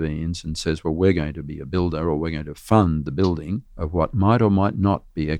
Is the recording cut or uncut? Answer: cut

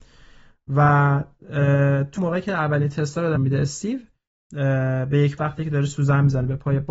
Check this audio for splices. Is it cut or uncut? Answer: cut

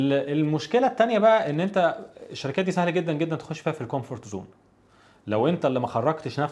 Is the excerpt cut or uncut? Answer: uncut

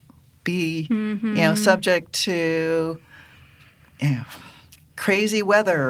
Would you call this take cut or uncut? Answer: uncut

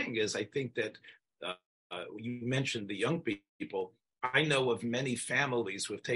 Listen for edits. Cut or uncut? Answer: uncut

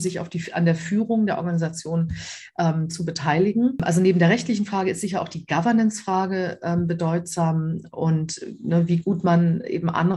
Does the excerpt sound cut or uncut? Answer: uncut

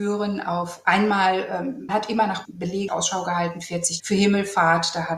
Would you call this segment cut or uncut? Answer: cut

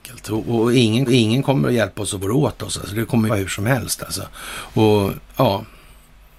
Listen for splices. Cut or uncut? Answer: cut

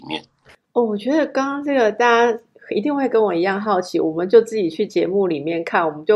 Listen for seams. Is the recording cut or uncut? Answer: uncut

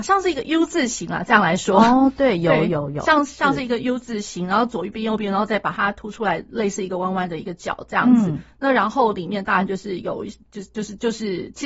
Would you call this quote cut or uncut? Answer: uncut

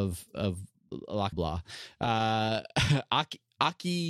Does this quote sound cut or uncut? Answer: cut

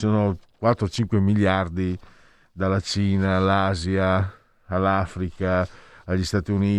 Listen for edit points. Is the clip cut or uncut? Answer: uncut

